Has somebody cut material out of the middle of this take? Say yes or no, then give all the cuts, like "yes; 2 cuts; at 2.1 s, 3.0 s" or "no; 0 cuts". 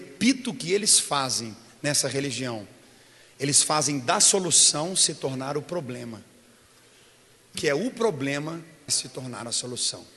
yes; 2 cuts; at 7.5 s, 8.9 s